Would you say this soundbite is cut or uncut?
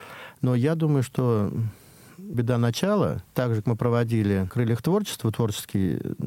cut